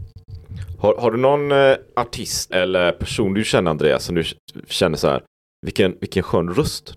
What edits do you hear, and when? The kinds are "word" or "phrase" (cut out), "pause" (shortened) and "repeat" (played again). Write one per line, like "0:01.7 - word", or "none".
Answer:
0:02.5 - word